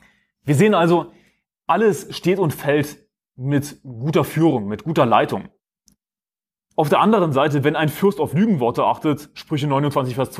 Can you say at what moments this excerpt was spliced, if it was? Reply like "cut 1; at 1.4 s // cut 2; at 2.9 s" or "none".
none